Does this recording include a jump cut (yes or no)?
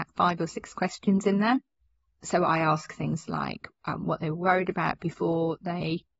no